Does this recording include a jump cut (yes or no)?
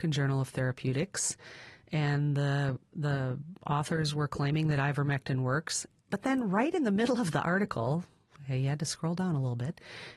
no